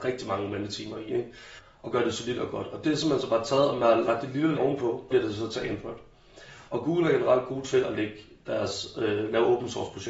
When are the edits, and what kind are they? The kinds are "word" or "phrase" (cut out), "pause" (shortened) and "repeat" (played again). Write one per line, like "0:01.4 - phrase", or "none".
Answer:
0:04.6 - word
0:05.1 - word